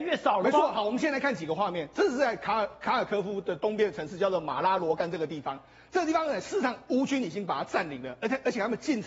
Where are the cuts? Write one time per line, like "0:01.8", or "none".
none